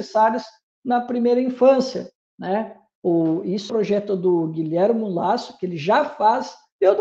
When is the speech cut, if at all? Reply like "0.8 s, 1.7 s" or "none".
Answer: 3.7 s